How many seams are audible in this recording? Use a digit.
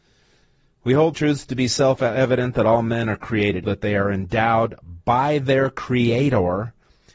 2